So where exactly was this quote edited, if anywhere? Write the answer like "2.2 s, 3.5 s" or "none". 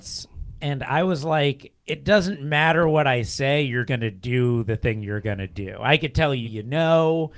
1.8 s, 3.9 s, 6.4 s